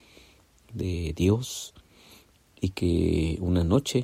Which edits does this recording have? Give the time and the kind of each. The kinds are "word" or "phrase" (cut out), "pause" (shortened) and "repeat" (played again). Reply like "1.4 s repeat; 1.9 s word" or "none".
none